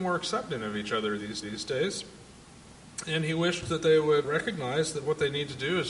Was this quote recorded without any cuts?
no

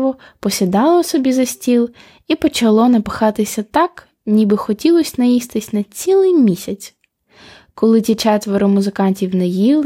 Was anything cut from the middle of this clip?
no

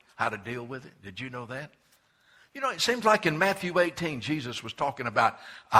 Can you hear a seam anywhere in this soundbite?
no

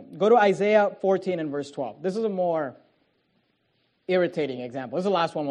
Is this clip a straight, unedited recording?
yes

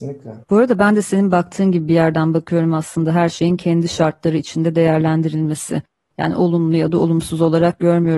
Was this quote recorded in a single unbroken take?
yes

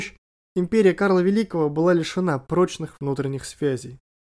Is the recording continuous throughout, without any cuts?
yes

